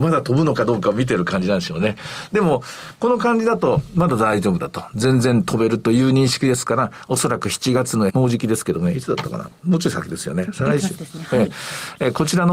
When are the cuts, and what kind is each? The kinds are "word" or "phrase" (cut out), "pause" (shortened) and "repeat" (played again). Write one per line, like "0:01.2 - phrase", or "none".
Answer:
0:08.1 - word